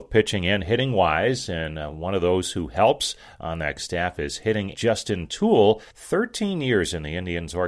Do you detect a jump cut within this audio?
yes; 3 cuts; at 3.8 s, 4.7 s, 5.9 s

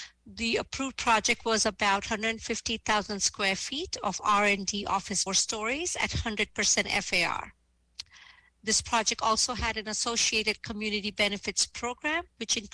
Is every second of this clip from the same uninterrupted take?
no; 1 cut; at 5.3 s

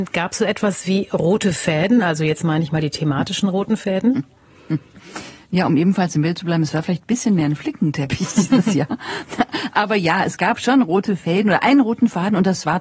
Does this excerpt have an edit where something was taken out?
no; 0 cuts

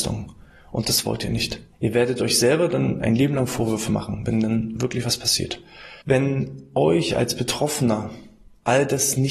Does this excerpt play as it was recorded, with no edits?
no; 2 cuts; at 1.7 s, 6.0 s

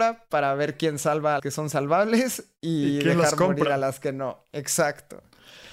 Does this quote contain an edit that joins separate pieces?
yes; 1 cut; at 1.4 s

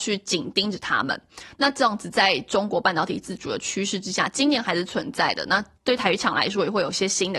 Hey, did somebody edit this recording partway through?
yes; 1 cut; at 5.7 s

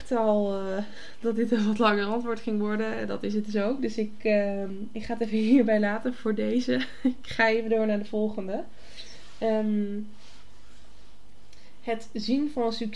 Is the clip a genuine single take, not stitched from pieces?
yes; 0 cuts

